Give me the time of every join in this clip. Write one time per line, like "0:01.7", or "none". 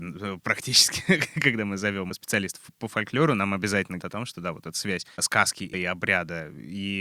0:04.0
0:05.7